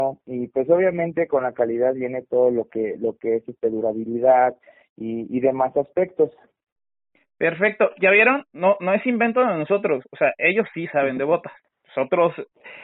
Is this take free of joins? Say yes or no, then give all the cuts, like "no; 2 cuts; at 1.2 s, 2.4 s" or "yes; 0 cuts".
yes; 0 cuts